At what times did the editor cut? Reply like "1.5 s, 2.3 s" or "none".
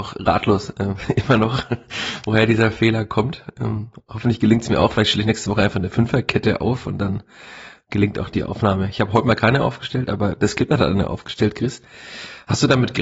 none